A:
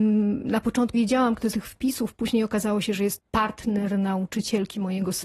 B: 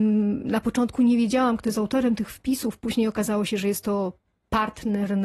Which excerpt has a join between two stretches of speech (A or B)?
A